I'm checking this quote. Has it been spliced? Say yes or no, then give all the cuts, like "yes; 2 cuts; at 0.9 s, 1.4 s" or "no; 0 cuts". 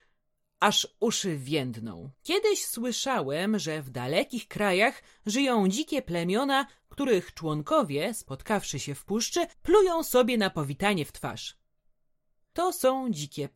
yes; 2 cuts; at 2.1 s, 9.5 s